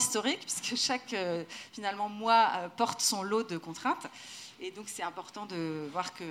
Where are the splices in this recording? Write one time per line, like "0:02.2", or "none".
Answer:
none